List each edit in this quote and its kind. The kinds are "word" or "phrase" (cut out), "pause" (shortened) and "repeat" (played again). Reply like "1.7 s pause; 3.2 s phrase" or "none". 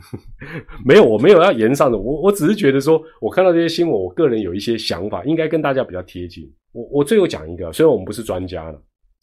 6.6 s pause

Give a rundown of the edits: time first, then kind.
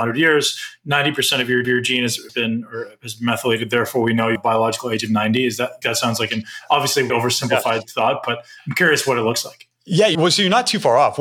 1.6 s repeat; 2.3 s word; 4.3 s word; 5.8 s word; 7.1 s word; 10.1 s word

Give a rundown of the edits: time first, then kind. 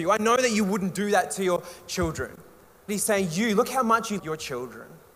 2.9 s phrase; 4.2 s word

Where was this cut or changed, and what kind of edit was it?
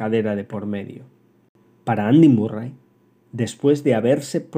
none

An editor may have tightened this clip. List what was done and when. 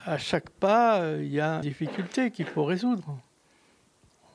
1.6 s word

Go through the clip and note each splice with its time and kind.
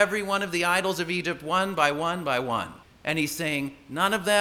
2.8 s pause

